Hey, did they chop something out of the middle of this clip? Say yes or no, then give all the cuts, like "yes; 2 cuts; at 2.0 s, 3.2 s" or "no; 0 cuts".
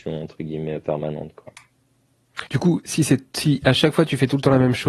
yes; 1 cut; at 2.5 s